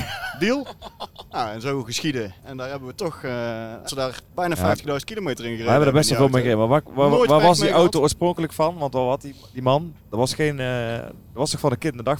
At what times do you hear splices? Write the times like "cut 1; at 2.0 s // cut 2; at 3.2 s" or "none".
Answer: cut 1; at 2.4 s // cut 2; at 3.9 s // cut 3; at 4.3 s // cut 4; at 10.0 s